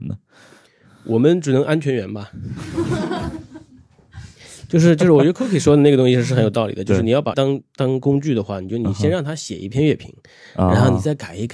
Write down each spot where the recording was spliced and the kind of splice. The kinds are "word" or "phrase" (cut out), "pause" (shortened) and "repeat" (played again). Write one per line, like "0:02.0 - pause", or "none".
0:07.3 - word